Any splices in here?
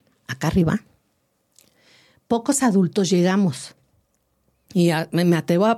no; 0 cuts

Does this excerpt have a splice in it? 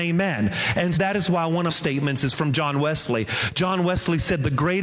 yes; 2 cuts; at 0.9 s, 1.7 s

